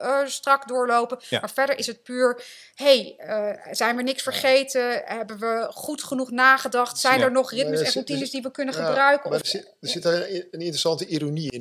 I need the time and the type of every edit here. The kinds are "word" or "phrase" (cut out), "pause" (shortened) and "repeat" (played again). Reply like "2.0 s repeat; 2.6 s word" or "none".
none